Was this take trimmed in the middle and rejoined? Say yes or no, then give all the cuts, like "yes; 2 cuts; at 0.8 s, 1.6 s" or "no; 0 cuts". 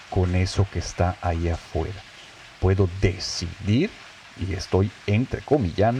no; 0 cuts